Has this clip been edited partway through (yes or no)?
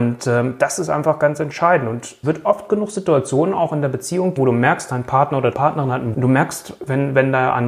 yes